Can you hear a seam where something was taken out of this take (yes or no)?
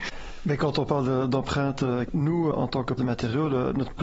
yes